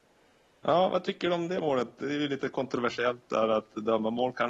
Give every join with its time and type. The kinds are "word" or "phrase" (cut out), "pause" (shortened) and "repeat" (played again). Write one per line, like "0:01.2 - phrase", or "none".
none